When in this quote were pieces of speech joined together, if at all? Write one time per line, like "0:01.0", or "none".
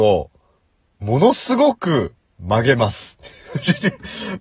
0:02.2